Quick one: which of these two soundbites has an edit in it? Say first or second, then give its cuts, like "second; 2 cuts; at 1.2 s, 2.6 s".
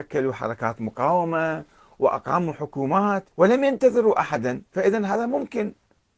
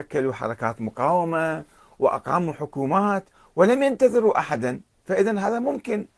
first; 2 cuts; at 3.3 s, 4.7 s